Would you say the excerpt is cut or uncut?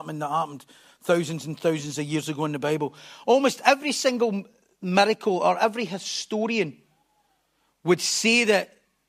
uncut